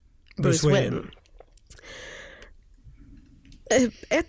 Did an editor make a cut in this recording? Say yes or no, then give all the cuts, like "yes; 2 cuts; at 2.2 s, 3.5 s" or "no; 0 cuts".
no; 0 cuts